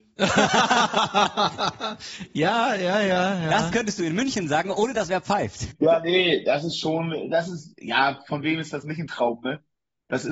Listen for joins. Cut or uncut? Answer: uncut